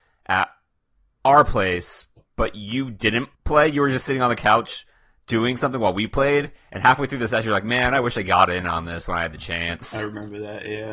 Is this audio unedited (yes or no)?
no